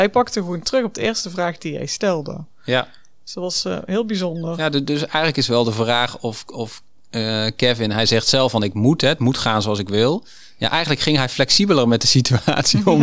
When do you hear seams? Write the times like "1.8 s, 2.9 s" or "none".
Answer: none